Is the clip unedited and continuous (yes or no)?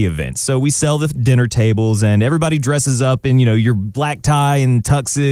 yes